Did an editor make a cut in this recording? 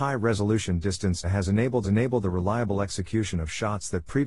yes; 2 cuts; at 1.2 s, 1.8 s

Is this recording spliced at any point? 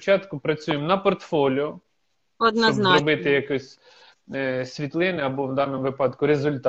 no; 0 cuts

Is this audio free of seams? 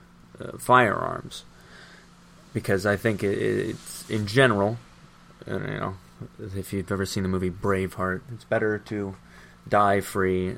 yes; 0 cuts

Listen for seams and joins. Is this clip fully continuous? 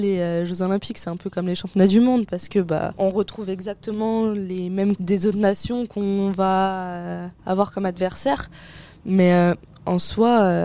no; 2 cuts; at 5.0 s, 7.4 s

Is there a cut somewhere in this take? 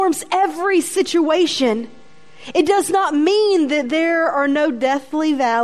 no; 0 cuts

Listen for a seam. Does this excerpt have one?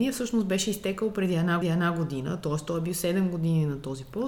yes; 1 cut; at 1.6 s

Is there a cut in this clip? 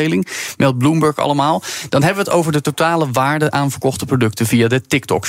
no; 0 cuts

